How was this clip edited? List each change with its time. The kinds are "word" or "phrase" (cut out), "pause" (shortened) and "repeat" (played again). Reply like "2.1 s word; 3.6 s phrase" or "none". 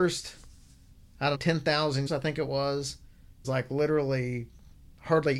1.3 s word; 2.1 s word; 3.4 s phrase